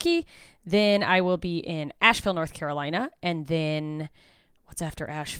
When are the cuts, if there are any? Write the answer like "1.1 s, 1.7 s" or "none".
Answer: none